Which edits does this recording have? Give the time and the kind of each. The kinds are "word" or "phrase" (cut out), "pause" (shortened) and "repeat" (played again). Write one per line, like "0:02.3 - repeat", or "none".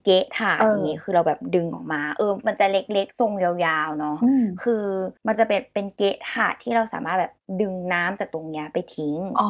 0:05.2 - pause